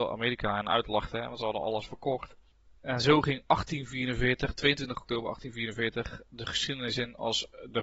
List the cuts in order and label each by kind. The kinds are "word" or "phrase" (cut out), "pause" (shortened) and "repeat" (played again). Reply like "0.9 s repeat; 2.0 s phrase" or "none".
none